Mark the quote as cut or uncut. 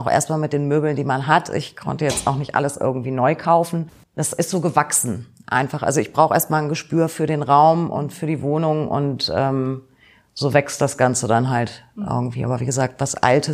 uncut